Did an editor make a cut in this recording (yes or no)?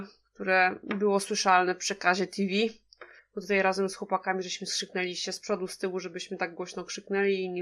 yes